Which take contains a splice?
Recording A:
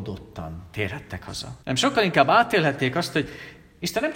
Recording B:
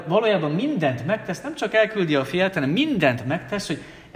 A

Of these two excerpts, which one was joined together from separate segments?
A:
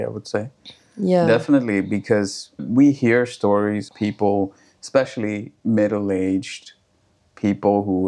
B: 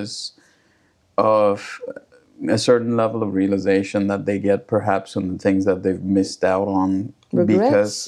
A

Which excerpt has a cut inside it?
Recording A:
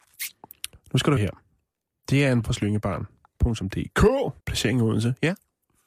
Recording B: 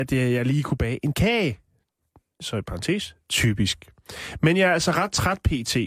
A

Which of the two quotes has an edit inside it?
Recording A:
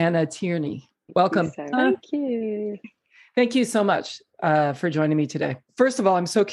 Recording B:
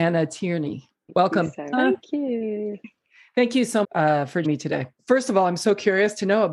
B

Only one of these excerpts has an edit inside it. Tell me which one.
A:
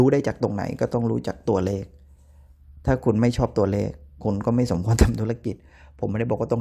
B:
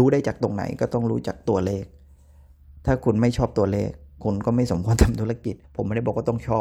B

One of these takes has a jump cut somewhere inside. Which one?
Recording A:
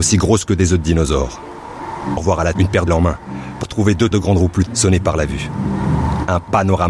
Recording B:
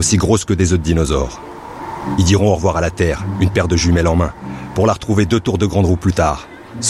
A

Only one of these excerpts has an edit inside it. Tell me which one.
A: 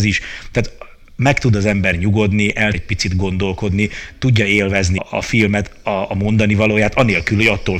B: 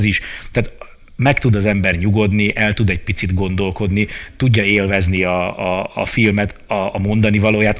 A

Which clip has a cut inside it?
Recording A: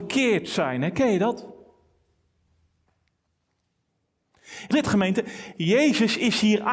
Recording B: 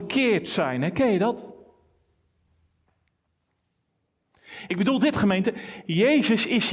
A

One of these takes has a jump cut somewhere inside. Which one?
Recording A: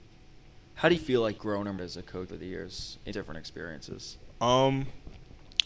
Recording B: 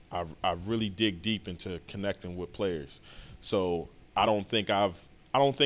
A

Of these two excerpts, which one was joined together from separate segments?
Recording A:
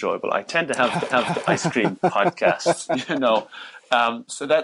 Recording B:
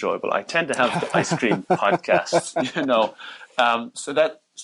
A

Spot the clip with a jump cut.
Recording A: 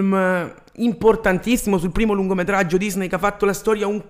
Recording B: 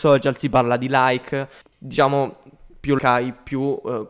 B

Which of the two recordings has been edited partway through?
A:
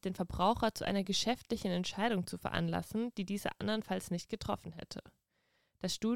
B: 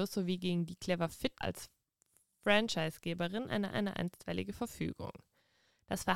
B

